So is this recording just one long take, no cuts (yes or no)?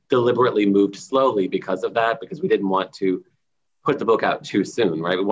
yes